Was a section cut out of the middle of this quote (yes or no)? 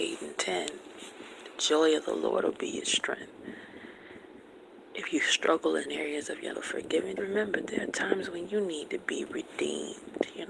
yes